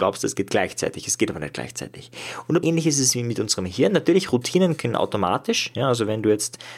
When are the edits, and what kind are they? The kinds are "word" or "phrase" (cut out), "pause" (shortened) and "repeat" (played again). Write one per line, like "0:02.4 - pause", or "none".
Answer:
0:02.6 - word